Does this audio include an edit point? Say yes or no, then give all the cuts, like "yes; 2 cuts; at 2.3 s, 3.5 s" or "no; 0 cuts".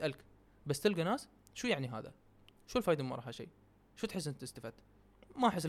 no; 0 cuts